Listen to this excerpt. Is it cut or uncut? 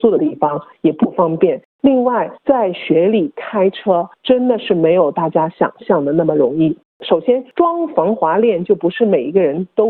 cut